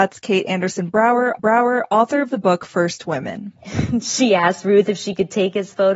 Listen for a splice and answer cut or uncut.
cut